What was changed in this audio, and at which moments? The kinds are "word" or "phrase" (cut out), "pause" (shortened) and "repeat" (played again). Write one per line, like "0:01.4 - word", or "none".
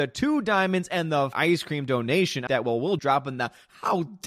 0:01.3 - word
0:02.5 - word
0:03.0 - word